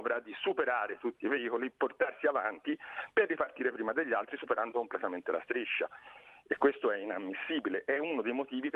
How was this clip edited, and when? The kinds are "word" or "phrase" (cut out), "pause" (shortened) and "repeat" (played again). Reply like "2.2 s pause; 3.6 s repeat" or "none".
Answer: none